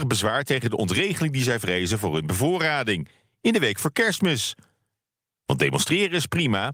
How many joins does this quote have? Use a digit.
0